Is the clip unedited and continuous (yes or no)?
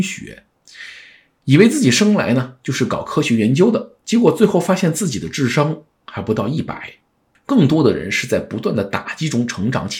yes